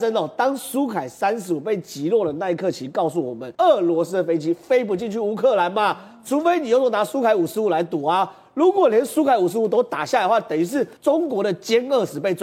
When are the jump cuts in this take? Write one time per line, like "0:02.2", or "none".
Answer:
0:03.5
0:11.0